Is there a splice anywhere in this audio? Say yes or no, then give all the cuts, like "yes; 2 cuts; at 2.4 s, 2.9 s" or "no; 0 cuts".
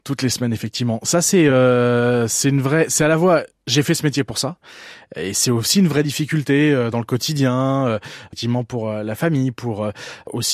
no; 0 cuts